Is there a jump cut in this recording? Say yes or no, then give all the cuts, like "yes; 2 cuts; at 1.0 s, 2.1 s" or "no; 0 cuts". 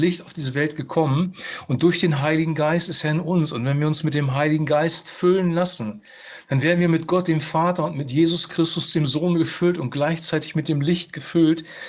no; 0 cuts